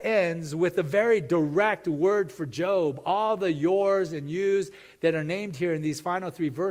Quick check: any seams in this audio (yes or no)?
no